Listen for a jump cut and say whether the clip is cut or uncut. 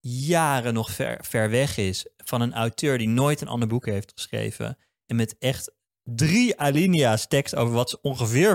uncut